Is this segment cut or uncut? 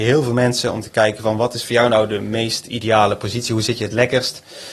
uncut